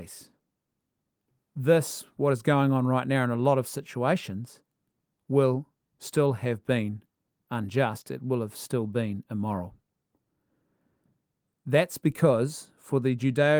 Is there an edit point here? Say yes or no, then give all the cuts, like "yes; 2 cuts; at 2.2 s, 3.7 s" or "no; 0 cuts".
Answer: no; 0 cuts